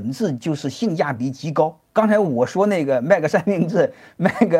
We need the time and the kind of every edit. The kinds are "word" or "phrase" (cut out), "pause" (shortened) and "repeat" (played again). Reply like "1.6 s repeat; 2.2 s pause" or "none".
1.9 s pause

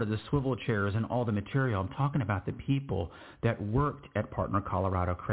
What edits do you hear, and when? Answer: none

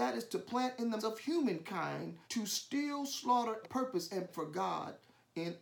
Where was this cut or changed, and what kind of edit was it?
1.0 s word; 2.2 s pause; 3.6 s phrase; 4.3 s word

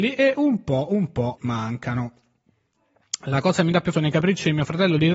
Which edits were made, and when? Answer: 1.4 s word; 3.9 s word

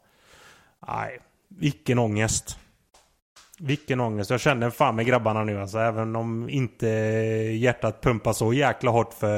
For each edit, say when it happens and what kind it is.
none

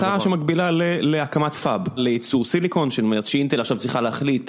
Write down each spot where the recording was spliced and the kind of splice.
2.0 s phrase

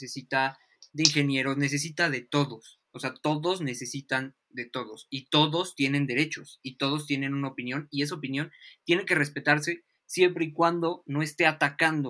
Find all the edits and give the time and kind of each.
none

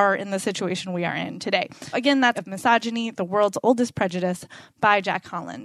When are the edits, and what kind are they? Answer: 1.9 s word; 2.3 s phrase

